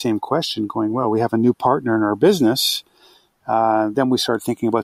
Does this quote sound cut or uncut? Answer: uncut